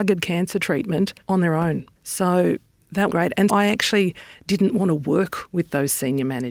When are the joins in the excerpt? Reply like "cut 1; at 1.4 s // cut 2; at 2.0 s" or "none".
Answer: cut 1; at 1.2 s // cut 2; at 2.0 s // cut 3; at 3.1 s // cut 4; at 3.5 s

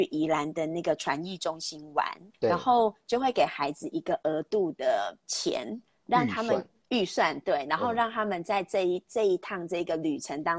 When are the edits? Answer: cut 1; at 2.3 s // cut 2; at 5.2 s

